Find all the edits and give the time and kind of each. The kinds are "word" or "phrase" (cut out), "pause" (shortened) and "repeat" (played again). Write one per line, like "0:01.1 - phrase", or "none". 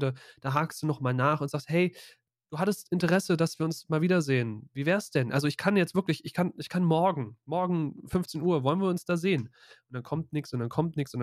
none